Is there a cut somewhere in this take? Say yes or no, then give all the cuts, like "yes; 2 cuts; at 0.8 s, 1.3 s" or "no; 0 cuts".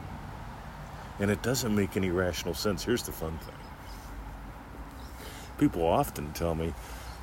no; 0 cuts